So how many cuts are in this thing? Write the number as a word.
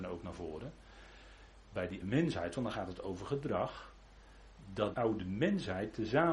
two